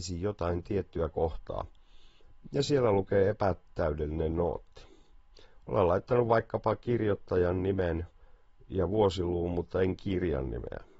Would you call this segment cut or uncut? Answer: uncut